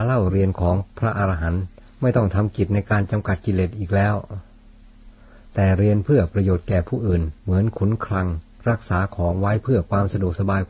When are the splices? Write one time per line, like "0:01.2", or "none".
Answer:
0:01.9
0:07.4